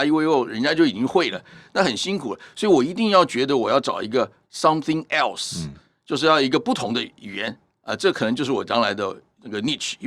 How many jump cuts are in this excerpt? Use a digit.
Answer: 0